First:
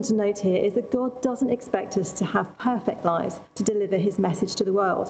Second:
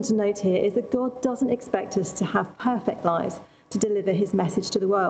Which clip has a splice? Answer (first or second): first